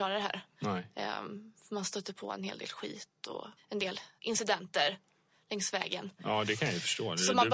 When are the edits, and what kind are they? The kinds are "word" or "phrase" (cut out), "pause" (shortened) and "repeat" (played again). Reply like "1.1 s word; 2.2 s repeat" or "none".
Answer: 3.6 s pause; 4.2 s pause